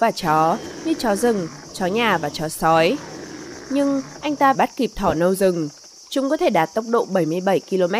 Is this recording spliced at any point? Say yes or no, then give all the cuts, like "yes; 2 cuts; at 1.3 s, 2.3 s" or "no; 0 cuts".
yes; 1 cut; at 4.5 s